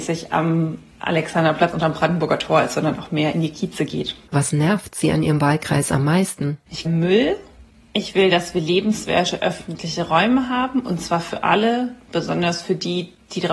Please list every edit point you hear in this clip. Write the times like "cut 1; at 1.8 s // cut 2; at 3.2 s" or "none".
cut 1; at 6.8 s